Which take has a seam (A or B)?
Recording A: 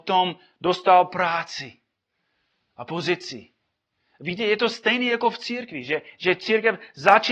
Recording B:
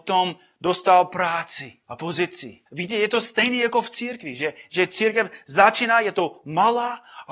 B